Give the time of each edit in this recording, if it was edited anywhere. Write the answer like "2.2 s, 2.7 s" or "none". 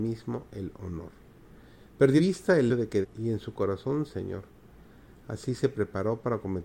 2.2 s, 2.7 s, 3.0 s, 4.1 s